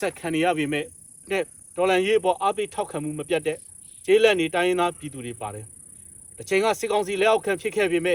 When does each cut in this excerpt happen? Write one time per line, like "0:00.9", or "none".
0:01.2